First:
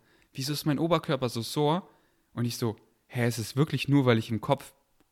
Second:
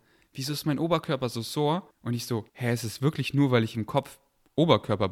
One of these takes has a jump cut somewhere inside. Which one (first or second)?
second